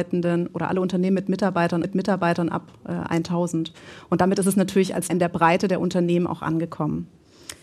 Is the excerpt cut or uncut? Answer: cut